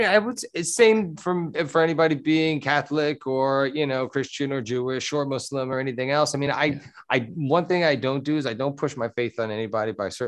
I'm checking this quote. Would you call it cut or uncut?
uncut